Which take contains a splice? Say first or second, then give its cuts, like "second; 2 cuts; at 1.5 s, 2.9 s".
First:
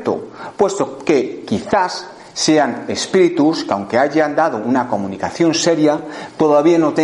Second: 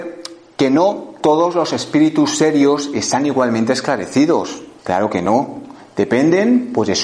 second; 1 cut; at 4.8 s